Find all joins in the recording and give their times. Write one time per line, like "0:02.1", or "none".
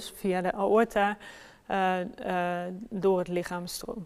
none